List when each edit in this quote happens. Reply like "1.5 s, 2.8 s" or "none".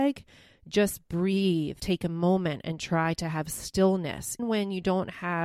1.8 s, 4.4 s